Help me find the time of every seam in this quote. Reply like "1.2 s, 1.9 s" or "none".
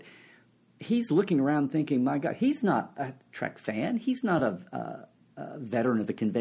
none